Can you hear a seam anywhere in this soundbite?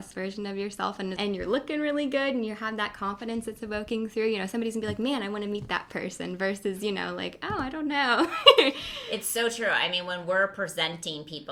yes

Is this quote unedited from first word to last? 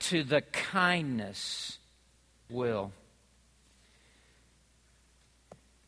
no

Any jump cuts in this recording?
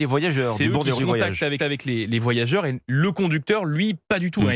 yes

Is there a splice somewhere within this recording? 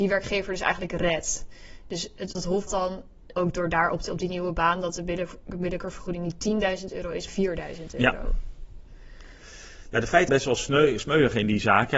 yes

